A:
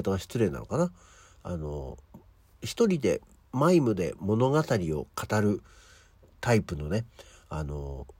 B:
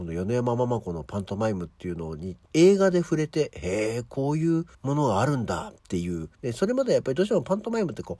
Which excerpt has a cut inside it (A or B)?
B